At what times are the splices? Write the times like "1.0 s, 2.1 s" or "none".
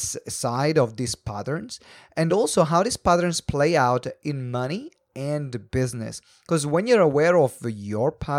none

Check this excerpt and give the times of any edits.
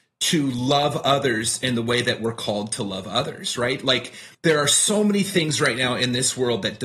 4.3 s

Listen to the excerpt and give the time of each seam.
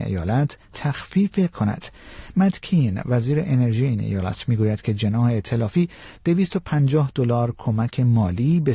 1.5 s

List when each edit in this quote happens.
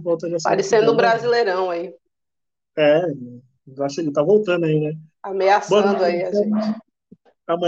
none

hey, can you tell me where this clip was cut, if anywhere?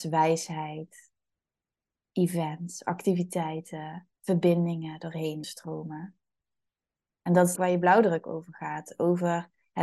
4.2 s, 5.4 s, 7.6 s

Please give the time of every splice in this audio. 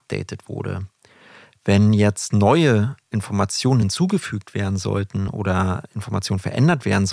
none

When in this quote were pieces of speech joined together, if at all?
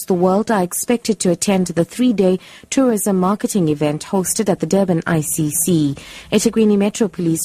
none

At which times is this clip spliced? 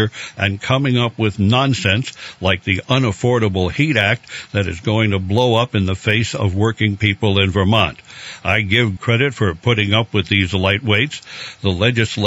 9.0 s

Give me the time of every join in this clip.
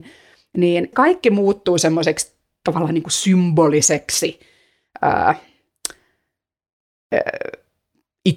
0.9 s

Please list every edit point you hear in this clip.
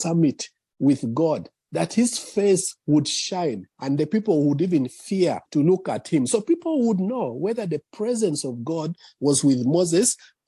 5.5 s

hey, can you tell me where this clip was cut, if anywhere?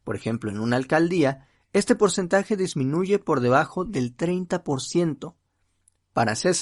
none

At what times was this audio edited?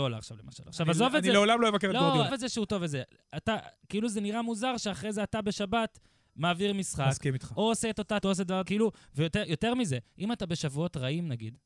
2.3 s, 8.2 s, 8.6 s

